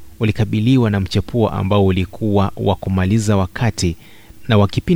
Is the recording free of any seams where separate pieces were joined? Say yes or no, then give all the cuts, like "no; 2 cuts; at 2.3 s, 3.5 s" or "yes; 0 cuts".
yes; 0 cuts